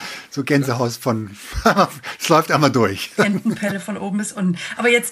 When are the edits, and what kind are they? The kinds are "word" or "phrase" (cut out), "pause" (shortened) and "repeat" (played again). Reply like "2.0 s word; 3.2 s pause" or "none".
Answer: none